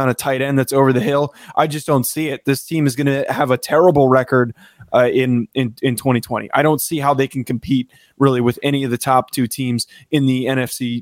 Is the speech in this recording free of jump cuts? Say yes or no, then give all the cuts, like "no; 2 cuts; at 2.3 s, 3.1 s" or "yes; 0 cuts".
yes; 0 cuts